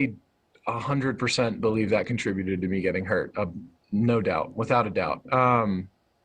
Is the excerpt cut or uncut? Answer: uncut